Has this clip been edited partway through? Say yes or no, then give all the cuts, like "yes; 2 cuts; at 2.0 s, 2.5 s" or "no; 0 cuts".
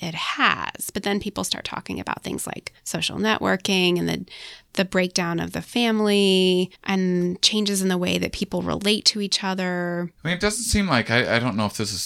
yes; 3 cuts; at 2.8 s, 6.7 s, 10.2 s